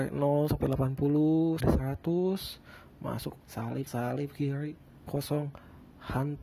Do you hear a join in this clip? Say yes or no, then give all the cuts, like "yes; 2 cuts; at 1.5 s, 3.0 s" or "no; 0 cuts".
yes; 4 cuts; at 1.6 s, 3.4 s, 3.9 s, 5.1 s